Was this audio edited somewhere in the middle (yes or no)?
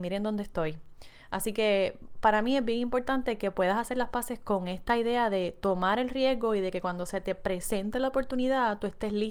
no